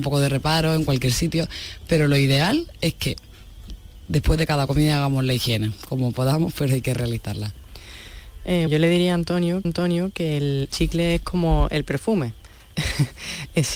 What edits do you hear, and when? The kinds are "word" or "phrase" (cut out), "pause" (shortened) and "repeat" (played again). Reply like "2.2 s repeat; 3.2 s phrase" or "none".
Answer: 8.7 s word; 9.6 s repeat; 10.7 s word